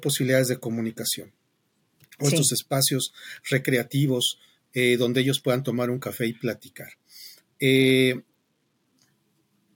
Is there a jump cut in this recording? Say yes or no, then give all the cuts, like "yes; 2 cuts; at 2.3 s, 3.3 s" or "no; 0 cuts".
no; 0 cuts